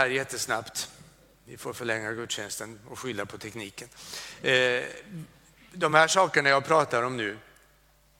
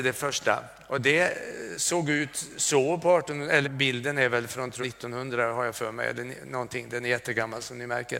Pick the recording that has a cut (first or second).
second